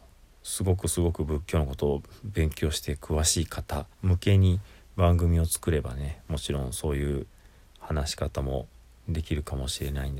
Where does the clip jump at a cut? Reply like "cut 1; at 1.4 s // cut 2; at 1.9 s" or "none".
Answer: cut 1; at 3.9 s